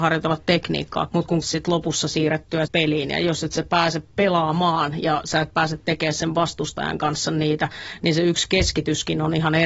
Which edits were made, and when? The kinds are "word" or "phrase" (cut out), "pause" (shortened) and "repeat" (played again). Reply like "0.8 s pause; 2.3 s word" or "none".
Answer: 1.1 s phrase; 1.4 s phrase; 2.7 s word